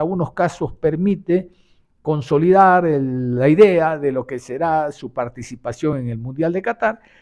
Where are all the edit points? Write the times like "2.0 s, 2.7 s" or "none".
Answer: none